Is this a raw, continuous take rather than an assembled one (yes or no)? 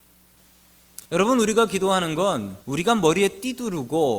no